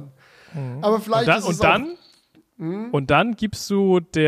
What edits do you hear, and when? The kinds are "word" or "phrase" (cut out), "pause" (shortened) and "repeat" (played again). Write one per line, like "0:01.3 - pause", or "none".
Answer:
none